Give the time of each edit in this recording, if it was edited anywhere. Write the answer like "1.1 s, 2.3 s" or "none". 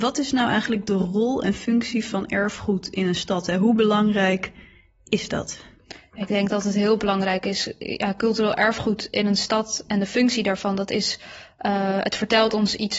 none